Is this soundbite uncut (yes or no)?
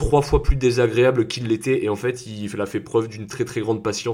yes